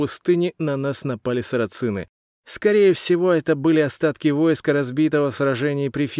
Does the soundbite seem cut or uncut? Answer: uncut